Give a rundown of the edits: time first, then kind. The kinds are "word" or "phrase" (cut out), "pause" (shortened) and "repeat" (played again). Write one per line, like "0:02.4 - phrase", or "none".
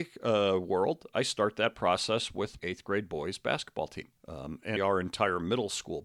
0:02.6 - word
0:04.2 - pause
0:04.8 - word